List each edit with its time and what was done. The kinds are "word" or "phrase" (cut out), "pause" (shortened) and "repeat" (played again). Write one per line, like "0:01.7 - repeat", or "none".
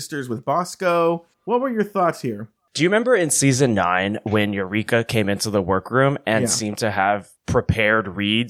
0:01.3 - pause
0:07.4 - pause

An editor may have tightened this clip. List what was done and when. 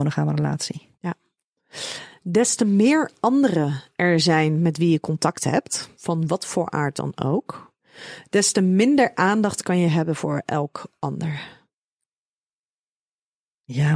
0:00.9 - pause

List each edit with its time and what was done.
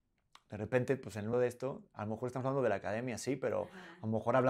0:01.3 - word

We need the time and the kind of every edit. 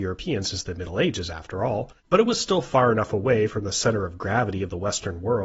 0:02.0 - pause

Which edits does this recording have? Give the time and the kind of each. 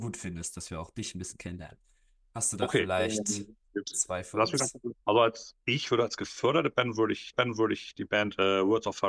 0:05.0 - pause
0:07.3 - repeat

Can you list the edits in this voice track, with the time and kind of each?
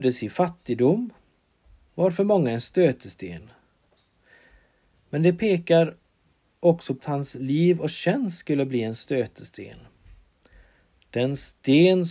0:07.0 - word

